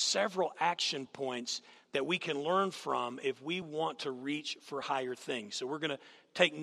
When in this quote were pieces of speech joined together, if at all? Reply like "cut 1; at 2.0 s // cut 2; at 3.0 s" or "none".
none